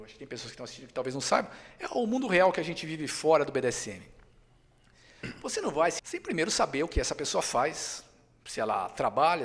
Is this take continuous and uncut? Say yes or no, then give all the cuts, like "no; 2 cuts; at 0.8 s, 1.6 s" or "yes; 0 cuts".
no; 1 cut; at 6.0 s